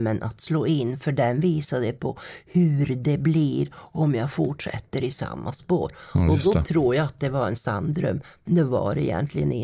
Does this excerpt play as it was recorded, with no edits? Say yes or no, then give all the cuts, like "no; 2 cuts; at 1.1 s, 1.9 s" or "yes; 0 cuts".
yes; 0 cuts